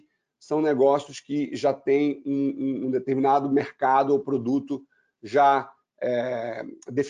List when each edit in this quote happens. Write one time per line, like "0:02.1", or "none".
none